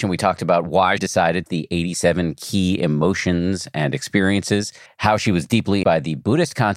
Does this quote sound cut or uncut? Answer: cut